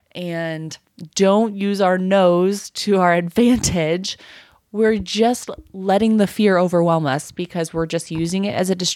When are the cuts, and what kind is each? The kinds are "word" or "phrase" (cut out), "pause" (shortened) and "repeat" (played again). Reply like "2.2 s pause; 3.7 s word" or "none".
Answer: none